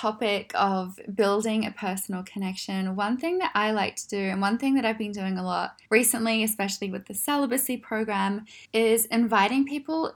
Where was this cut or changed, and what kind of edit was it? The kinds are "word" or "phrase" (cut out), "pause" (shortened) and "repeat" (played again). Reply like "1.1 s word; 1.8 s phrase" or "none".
5.9 s pause; 8.6 s pause